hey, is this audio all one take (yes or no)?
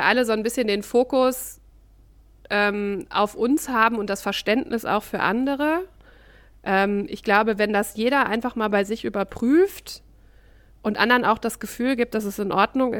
yes